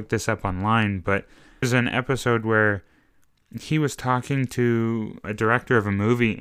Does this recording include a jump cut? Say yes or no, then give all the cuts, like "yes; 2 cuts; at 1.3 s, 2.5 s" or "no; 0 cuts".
yes; 2 cuts; at 1.6 s, 5.2 s